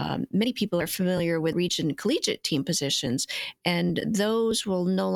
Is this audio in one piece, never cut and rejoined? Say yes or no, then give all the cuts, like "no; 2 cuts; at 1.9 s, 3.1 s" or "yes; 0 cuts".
no; 1 cut; at 1.5 s